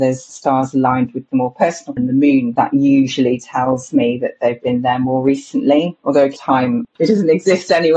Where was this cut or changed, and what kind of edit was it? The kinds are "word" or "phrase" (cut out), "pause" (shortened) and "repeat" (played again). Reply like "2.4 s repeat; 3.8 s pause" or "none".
2.0 s phrase

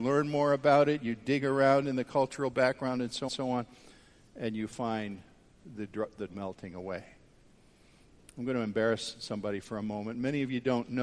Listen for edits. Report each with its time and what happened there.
3.3 s repeat; 6.3 s word

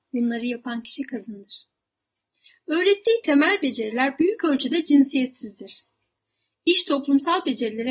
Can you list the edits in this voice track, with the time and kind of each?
none

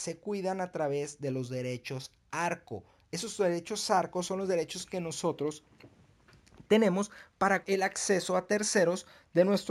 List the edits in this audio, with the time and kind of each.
7.6 s word

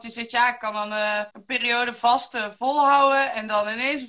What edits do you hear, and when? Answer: 1.3 s pause

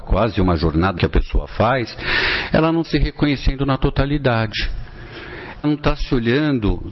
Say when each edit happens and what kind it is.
1.0 s word; 2.8 s word; 5.6 s word

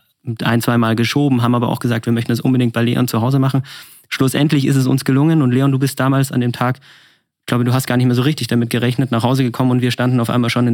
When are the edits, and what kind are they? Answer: none

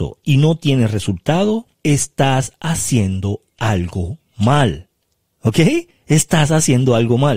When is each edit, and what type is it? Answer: 1.7 s pause; 5.9 s pause

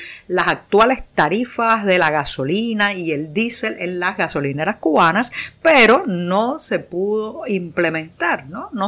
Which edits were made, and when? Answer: none

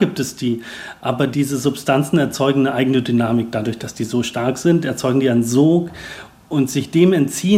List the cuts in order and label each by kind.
none

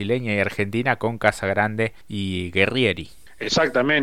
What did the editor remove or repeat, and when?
2.0 s pause

